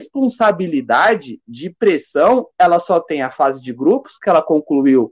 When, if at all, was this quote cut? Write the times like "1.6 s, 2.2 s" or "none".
none